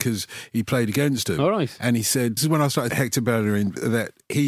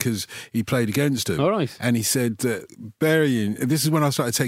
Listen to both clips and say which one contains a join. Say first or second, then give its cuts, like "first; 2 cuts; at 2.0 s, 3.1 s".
first; 2 cuts; at 2.4 s, 2.9 s